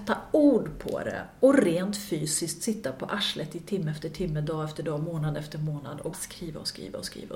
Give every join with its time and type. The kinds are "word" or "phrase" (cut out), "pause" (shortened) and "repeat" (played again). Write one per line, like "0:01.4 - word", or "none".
0:06.1 - word